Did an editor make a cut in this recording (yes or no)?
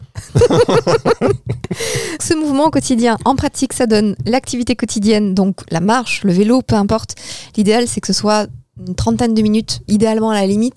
yes